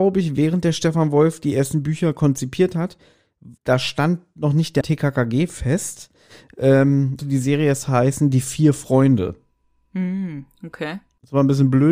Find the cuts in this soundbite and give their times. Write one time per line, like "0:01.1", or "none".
0:03.6
0:04.8
0:07.2

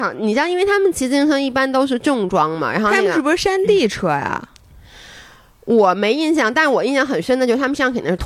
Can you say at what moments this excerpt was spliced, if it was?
none

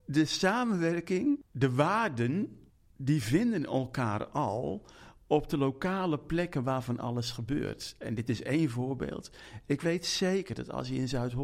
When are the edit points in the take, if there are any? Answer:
none

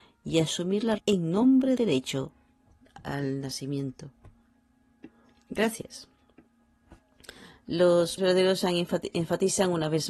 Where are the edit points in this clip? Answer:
0:01.0
0:01.8
0:08.2

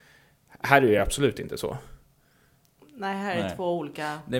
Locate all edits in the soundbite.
none

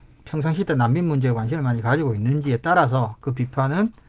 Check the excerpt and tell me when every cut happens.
none

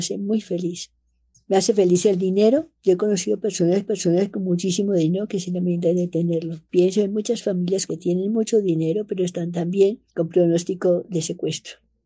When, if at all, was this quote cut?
0:01.3
0:02.8
0:03.8
0:06.6
0:07.9
0:10.1

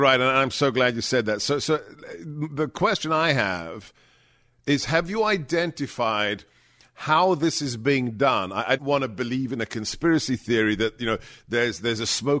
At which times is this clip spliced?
0:08.8

